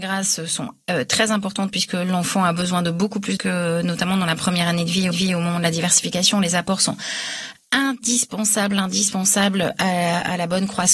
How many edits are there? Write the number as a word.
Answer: two